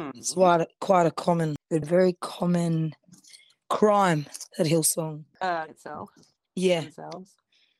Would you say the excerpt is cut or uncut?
cut